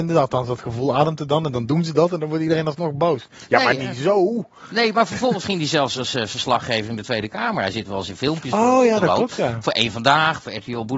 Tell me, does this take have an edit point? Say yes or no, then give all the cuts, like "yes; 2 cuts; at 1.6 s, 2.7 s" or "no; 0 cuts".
no; 0 cuts